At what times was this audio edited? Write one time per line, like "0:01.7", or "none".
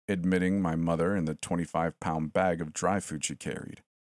none